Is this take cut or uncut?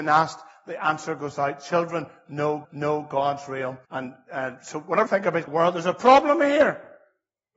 cut